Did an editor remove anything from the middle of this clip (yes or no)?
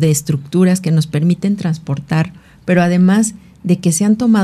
no